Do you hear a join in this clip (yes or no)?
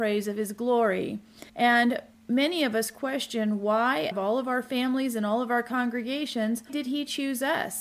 yes